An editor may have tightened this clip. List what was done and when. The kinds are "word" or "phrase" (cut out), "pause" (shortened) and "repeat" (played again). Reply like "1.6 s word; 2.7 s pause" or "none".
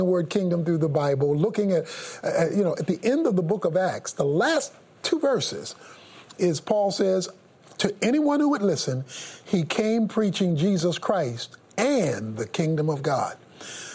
none